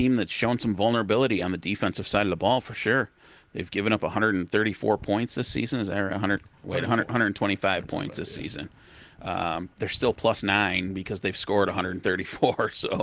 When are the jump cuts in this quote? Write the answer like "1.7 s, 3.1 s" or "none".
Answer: none